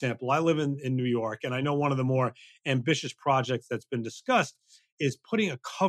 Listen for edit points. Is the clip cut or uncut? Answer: uncut